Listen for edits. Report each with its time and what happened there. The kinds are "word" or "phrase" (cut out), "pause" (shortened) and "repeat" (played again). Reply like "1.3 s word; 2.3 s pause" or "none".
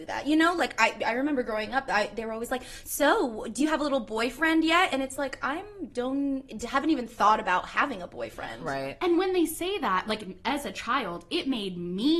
none